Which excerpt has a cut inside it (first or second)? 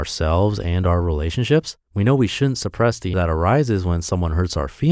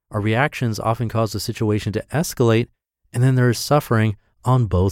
first